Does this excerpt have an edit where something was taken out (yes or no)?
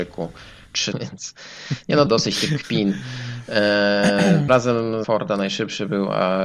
yes